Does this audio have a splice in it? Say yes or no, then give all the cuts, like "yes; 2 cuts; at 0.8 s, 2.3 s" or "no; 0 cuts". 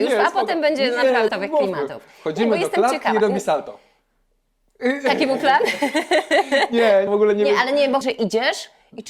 yes; 3 cuts; at 1.3 s, 7.1 s, 8.0 s